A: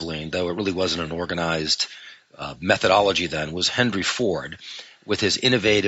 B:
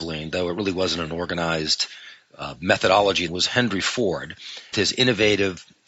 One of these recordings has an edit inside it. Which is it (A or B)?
B